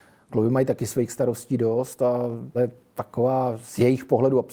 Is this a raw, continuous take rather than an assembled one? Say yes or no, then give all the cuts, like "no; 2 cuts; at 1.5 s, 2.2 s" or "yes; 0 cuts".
no; 1 cut; at 2.5 s